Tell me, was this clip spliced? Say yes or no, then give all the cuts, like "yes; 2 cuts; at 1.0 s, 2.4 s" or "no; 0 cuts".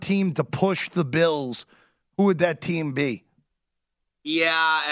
no; 0 cuts